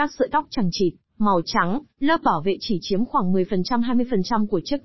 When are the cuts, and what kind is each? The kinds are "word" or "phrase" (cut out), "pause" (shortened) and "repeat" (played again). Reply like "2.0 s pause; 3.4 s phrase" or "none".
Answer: none